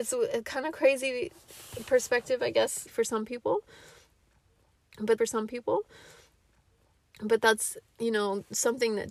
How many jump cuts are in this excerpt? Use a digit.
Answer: 2